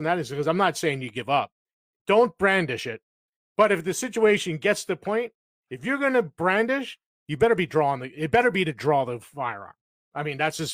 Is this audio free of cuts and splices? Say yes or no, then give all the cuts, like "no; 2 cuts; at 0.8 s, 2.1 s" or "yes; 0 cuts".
yes; 0 cuts